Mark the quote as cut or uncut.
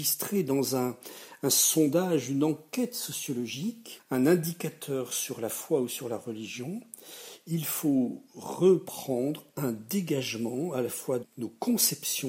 cut